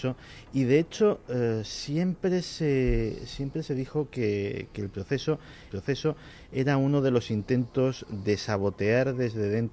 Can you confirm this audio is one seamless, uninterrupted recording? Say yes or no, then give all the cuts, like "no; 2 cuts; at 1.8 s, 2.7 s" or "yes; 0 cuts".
no; 1 cut; at 5.7 s